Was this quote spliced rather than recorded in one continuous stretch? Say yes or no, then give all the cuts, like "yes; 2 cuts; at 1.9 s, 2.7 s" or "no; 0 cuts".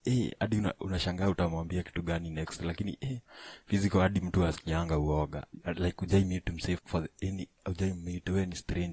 yes; 1 cut; at 6.8 s